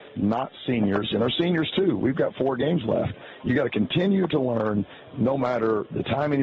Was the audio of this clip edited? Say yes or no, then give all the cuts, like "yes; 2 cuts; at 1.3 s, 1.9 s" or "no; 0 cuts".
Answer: no; 0 cuts